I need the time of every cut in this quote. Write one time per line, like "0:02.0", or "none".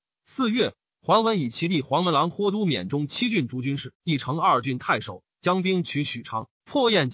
0:04.0